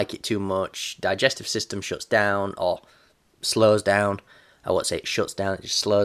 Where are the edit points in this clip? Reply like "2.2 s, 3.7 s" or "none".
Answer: none